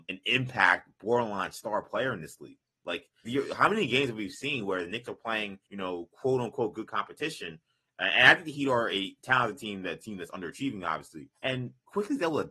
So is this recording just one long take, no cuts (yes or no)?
no